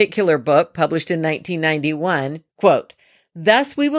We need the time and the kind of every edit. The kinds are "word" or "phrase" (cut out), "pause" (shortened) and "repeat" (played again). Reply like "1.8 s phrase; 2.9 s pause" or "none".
2.5 s pause